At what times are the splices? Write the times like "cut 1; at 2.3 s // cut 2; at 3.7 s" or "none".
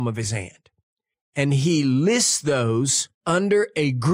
cut 1; at 1.1 s // cut 2; at 3.1 s